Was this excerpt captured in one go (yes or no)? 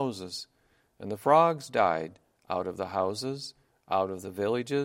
yes